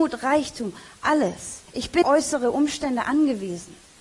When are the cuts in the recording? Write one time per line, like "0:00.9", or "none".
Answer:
0:01.7
0:02.0